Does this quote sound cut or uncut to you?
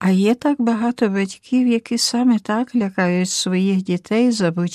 uncut